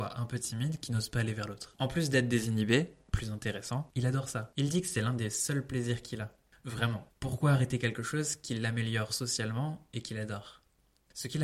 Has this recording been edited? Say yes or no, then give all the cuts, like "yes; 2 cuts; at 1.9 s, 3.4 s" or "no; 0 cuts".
no; 0 cuts